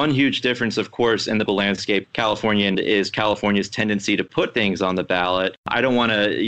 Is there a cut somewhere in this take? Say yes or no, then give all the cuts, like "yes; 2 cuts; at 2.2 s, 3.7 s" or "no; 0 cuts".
yes; 3 cuts; at 1.5 s, 2.0 s, 2.7 s